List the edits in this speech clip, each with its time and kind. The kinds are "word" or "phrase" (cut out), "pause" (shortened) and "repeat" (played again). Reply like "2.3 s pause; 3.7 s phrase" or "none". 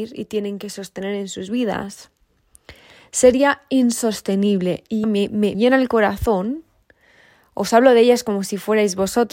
5.0 s phrase; 5.5 s word